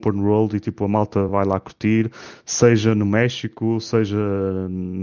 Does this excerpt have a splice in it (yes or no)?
no